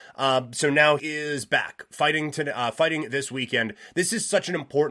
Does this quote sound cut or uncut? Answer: cut